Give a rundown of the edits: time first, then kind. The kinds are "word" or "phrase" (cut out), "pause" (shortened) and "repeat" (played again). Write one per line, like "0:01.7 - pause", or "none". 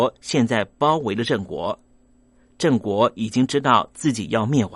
none